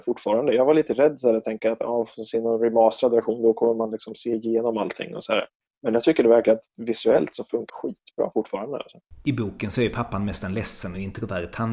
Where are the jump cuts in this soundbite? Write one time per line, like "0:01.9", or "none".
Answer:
0:07.7